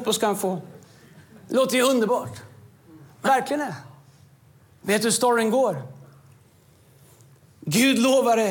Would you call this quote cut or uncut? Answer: cut